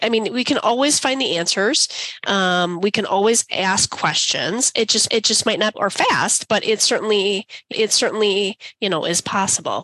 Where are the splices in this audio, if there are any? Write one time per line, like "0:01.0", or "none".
0:05.1
0:05.7
0:07.7